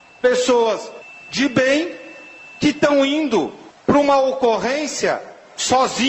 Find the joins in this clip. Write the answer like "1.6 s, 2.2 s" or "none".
none